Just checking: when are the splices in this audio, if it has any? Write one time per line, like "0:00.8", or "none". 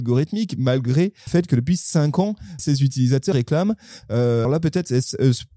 0:01.3
0:02.6
0:03.3
0:04.4